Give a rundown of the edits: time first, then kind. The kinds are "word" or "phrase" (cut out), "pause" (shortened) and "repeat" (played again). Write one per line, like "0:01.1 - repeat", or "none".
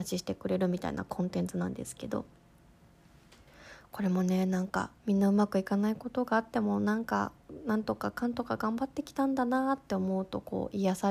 0:05.0 - pause